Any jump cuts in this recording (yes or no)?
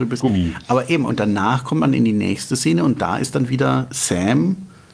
no